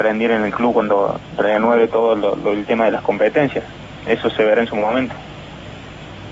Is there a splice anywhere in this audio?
no; 0 cuts

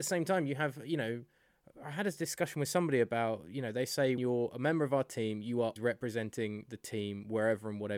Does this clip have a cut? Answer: yes; 2 cuts; at 4.2 s, 5.8 s

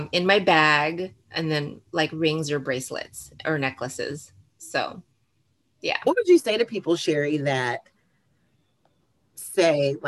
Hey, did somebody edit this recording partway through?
no; 0 cuts

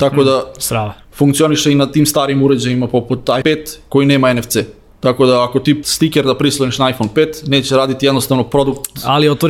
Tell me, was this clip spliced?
yes; 2 cuts; at 3.4 s, 5.8 s

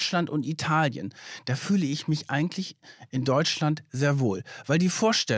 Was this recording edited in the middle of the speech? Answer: no; 0 cuts

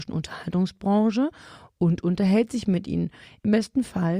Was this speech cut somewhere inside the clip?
no; 0 cuts

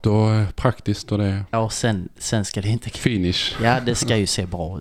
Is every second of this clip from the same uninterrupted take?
no; 1 cut; at 1.5 s

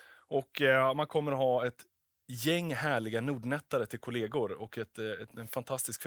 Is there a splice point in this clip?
no; 0 cuts

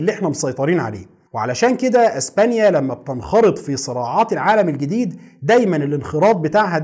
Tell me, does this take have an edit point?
yes; 1 cut; at 1.3 s

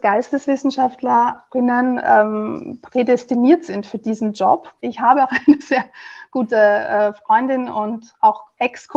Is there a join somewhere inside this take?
yes; 1 cut; at 4.8 s

